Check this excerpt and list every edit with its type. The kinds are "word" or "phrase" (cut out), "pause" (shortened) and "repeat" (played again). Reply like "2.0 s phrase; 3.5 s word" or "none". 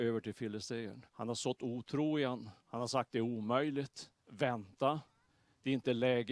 1.1 s pause; 2.6 s pause; 4.2 s pause